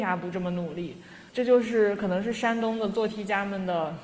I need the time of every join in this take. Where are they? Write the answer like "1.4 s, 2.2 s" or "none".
1.3 s